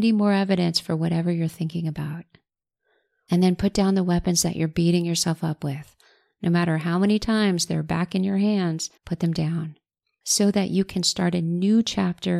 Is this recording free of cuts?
no; 2 cuts; at 9.0 s, 10.0 s

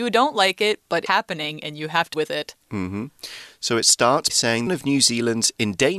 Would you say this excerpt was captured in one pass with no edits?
no; 4 cuts; at 1.1 s, 2.1 s, 4.3 s, 4.7 s

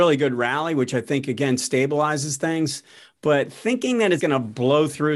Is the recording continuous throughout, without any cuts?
no; 1 cut; at 4.2 s

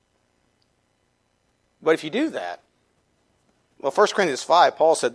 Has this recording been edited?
no; 0 cuts

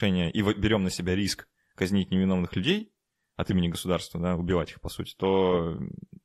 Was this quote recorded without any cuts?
yes; 0 cuts

